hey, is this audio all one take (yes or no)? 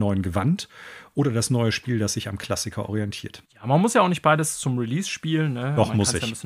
no